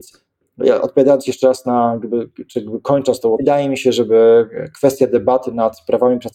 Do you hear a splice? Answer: yes; 1 cut; at 3.4 s

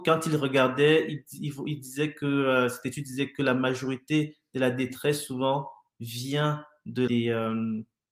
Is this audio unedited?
no; 1 cut; at 7.1 s

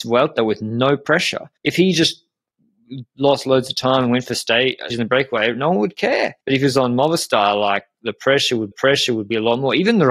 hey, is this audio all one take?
no; 4 cuts; at 1.6 s, 4.9 s, 6.4 s, 8.7 s

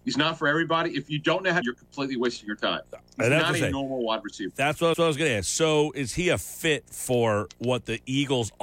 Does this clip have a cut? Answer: yes; 2 cuts; at 1.6 s, 4.9 s

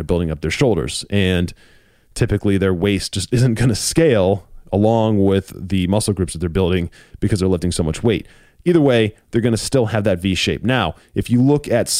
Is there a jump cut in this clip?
no; 0 cuts

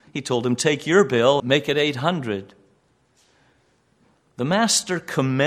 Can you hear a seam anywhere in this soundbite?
yes; 1 cut; at 1.4 s

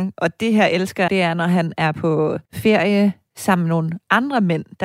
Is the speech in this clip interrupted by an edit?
yes; 2 cuts; at 1.1 s, 2.4 s

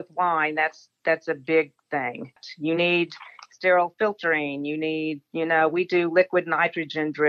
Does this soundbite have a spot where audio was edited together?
no; 0 cuts

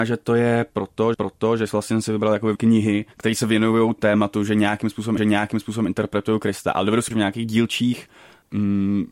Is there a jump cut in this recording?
yes; 6 cuts; at 1.1 s, 2.6 s, 3.1 s, 4.0 s, 5.2 s, 7.1 s

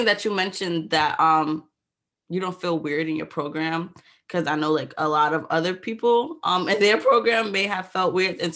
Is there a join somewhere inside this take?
no; 0 cuts

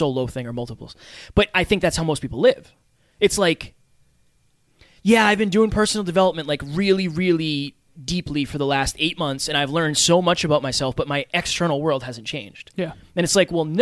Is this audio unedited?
yes; 0 cuts

